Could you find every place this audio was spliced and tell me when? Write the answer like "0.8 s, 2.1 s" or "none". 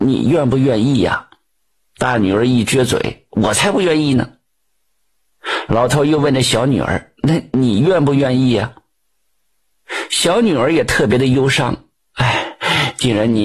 none